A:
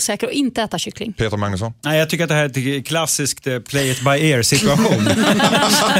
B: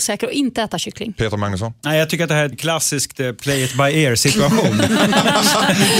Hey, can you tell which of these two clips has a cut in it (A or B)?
B